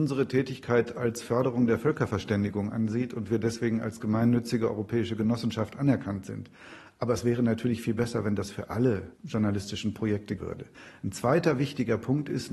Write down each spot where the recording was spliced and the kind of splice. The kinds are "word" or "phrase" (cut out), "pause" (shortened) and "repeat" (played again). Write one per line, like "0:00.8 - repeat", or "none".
0:09.1 - pause
0:10.4 - word